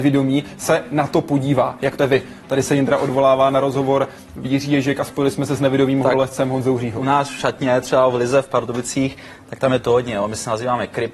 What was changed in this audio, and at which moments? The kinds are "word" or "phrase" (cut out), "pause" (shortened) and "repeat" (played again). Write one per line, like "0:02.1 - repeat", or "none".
0:02.0 - word
0:04.4 - phrase

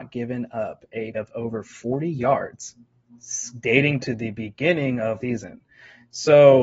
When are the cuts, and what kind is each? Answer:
0:01.1 - word
0:04.0 - word
0:05.2 - word

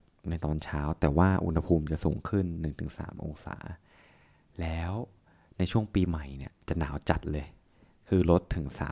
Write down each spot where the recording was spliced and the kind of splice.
none

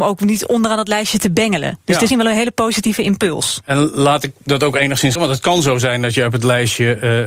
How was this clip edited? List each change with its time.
0:02.1 - word
0:05.2 - word

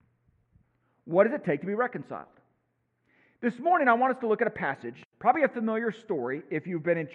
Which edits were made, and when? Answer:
none

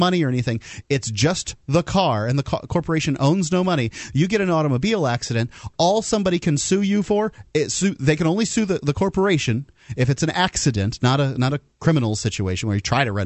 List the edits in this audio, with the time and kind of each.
none

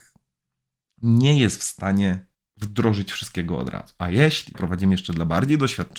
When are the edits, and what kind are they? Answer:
0:02.3 - pause
0:04.5 - phrase

